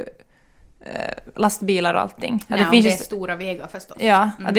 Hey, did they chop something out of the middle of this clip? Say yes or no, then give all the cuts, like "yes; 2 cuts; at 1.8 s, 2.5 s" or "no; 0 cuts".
no; 0 cuts